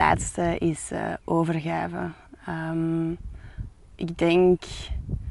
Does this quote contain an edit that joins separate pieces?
no; 0 cuts

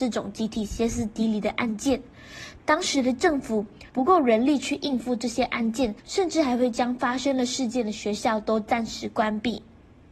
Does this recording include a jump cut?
yes; 2 cuts; at 3.9 s, 6.0 s

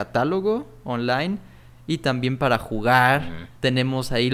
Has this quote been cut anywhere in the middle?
no; 0 cuts

